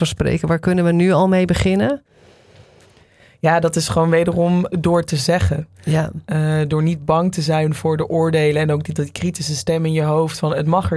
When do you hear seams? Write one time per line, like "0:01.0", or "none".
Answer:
0:04.7